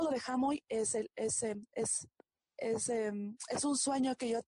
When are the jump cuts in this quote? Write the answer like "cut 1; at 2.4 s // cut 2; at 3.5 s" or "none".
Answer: none

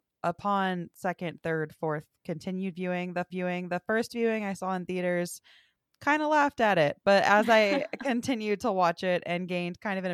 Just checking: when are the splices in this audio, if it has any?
cut 1; at 3.3 s

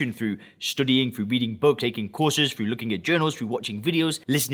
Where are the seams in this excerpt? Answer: cut 1; at 1.8 s

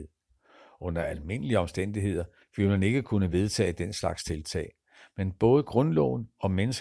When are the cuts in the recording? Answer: none

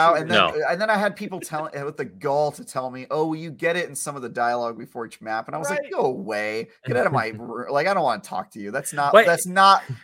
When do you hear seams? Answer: none

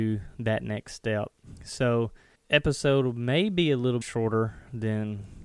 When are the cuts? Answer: cut 1; at 2.4 s // cut 2; at 4.0 s

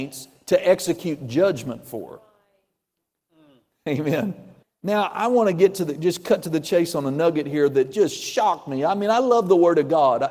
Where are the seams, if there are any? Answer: cut 1; at 4.6 s

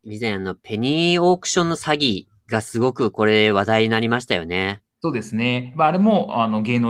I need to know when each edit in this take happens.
cut 1; at 4.9 s

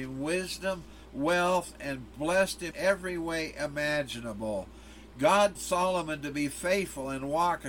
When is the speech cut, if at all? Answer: cut 1; at 2.7 s // cut 2; at 5.5 s

